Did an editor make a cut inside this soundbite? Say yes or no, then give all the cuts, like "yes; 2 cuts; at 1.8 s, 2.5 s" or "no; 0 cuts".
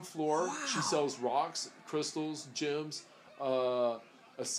no; 0 cuts